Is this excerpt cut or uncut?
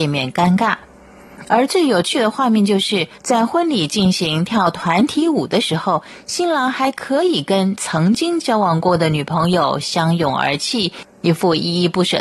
cut